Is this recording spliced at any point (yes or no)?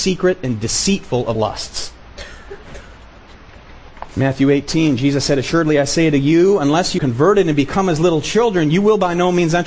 yes